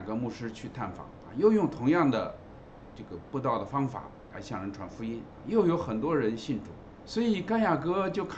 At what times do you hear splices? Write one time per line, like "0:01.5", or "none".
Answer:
0:07.0